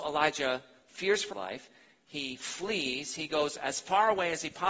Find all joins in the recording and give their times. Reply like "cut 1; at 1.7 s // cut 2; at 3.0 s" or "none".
cut 1; at 1.3 s